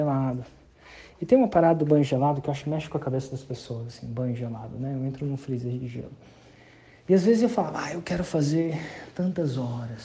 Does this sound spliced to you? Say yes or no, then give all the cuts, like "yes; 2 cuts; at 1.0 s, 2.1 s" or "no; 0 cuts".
no; 0 cuts